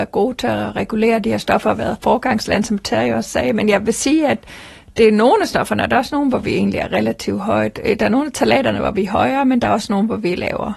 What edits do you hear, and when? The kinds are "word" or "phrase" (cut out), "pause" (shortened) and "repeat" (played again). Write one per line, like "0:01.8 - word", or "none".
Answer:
none